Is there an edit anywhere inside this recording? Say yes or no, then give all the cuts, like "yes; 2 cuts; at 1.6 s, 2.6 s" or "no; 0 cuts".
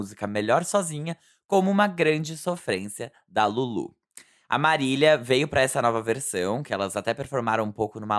no; 0 cuts